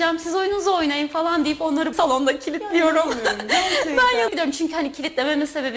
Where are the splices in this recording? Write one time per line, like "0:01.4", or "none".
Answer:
0:01.9
0:04.3